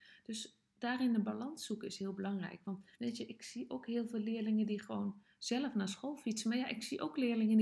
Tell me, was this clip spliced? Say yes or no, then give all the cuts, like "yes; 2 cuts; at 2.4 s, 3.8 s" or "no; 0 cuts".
yes; 1 cut; at 2.9 s